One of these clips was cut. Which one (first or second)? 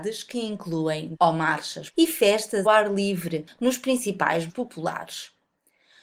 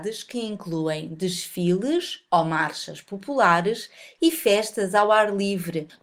first